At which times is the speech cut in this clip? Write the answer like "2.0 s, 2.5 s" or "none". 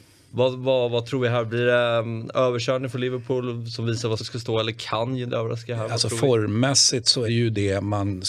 4.2 s, 5.3 s, 7.3 s